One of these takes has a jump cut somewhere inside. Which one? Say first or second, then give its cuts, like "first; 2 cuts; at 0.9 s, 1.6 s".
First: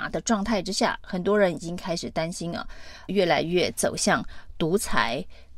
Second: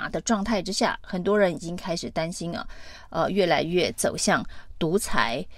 first; 1 cut; at 3.1 s